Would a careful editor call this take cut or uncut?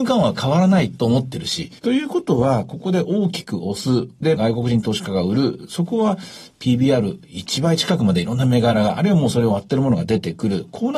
cut